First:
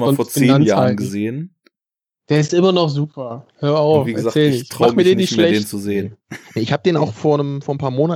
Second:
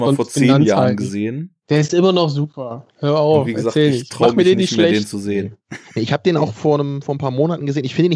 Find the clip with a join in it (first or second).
second